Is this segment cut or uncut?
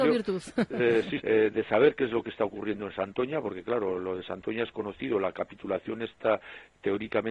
cut